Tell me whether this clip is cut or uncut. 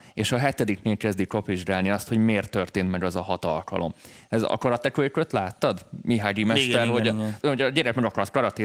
cut